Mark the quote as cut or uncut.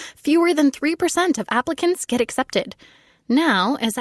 uncut